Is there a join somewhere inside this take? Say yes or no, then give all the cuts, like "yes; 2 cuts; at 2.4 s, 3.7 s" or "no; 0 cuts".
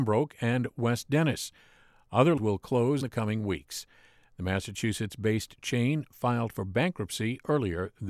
yes; 2 cuts; at 2.4 s, 3.0 s